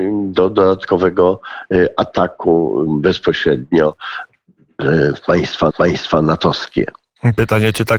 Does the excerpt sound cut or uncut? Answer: cut